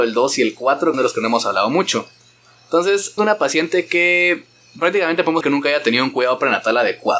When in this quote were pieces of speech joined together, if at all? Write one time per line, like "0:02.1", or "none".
0:00.9
0:03.2
0:05.4